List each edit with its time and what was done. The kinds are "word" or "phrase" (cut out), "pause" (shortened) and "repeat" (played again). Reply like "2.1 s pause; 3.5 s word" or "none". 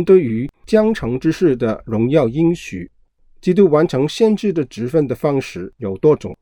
none